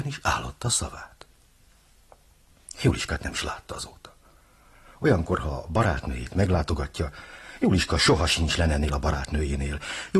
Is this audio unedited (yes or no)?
yes